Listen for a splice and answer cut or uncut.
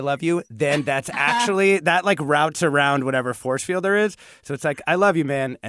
uncut